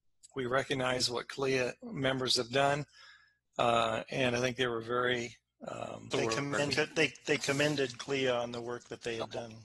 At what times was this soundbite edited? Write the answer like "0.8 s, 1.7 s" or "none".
6.7 s

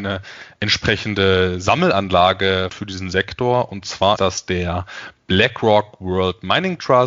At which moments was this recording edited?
2.7 s, 4.2 s

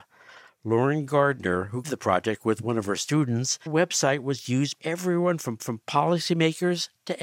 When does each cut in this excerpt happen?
1.8 s, 3.7 s, 4.8 s, 5.6 s

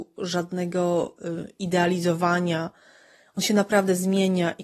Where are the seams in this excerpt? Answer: none

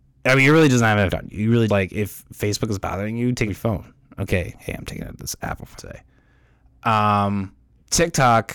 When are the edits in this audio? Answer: 1.1 s, 1.7 s, 3.5 s, 5.8 s

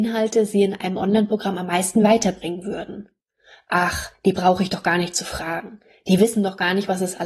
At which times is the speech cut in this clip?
none

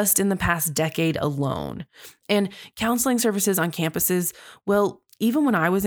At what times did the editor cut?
none

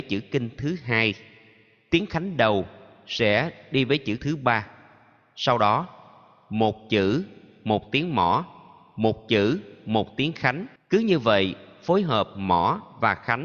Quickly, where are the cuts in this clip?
4.2 s, 10.8 s

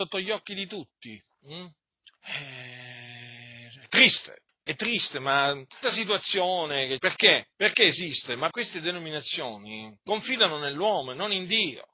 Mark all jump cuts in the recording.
2.2 s, 4.5 s, 5.8 s, 7.0 s, 7.5 s, 8.5 s, 10.0 s

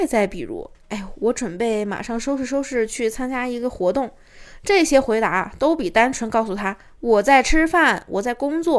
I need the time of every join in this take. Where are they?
none

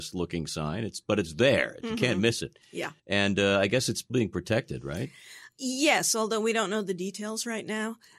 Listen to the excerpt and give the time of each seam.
3.0 s, 4.1 s

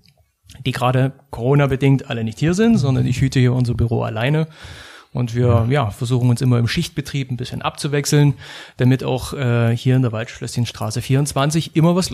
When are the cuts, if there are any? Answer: none

